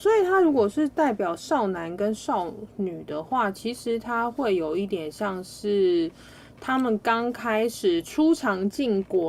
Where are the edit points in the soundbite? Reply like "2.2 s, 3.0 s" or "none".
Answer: none